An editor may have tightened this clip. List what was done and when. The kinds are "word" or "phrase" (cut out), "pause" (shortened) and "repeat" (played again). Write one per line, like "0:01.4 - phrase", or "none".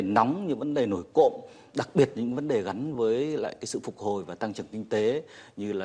none